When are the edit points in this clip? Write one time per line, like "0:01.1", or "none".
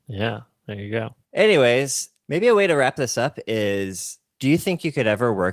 0:01.2